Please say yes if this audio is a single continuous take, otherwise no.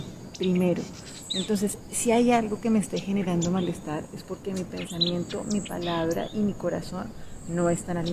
yes